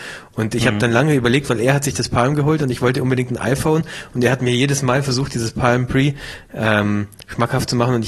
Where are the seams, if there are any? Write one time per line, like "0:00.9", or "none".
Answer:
none